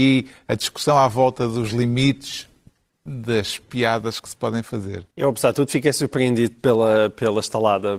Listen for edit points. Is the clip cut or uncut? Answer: cut